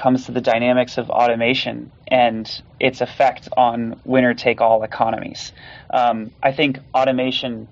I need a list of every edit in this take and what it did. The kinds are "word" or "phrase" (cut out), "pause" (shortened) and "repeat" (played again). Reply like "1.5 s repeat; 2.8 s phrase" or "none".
6.3 s pause